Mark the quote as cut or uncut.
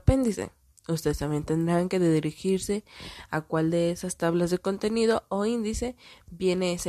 uncut